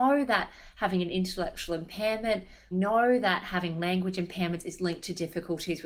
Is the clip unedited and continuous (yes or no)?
no